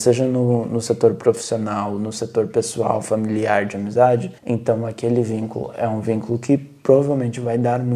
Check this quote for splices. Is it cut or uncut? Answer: cut